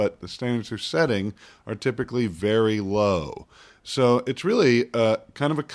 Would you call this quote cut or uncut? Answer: uncut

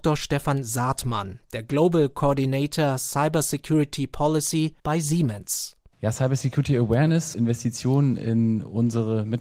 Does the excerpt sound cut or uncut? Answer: cut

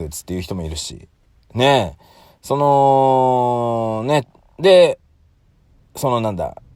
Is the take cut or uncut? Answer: uncut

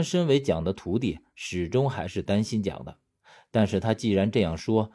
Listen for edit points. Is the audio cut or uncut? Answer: uncut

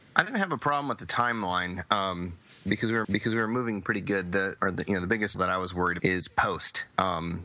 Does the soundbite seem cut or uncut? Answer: cut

